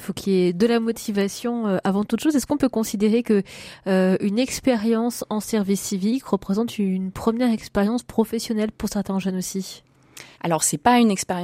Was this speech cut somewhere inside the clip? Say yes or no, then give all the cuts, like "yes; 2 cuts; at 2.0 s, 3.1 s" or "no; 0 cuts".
yes; 1 cut; at 10.3 s